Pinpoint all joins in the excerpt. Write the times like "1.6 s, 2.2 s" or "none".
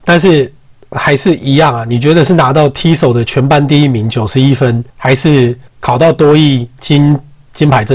4.9 s, 5.7 s